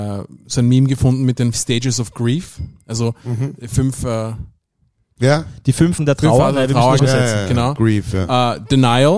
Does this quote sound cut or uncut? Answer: cut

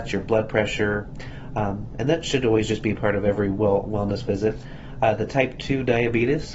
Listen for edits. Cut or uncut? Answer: uncut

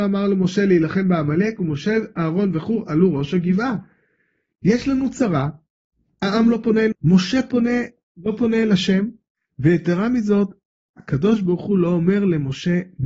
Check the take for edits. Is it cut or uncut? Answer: cut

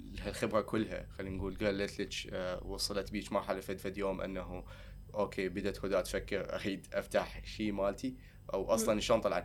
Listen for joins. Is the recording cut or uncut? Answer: cut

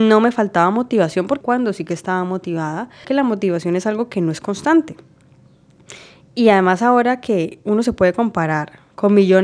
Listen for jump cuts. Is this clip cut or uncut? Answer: cut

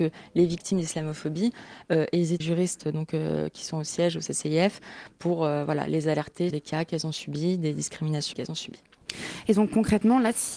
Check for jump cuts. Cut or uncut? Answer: cut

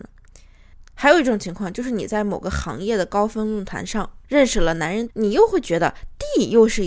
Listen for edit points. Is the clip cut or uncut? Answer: cut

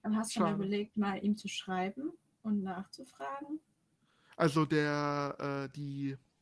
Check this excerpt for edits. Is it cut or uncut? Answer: uncut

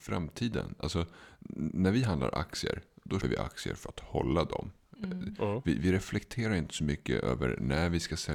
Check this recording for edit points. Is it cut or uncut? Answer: cut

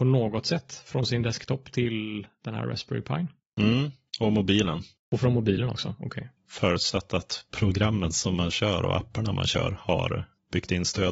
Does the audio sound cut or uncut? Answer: uncut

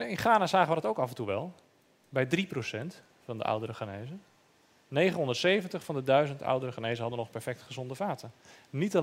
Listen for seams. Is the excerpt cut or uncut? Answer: uncut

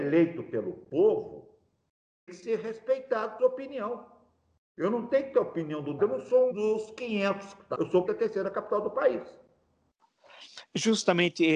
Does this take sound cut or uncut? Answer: cut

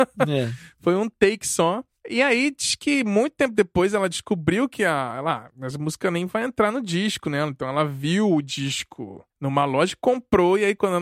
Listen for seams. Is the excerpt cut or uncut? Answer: uncut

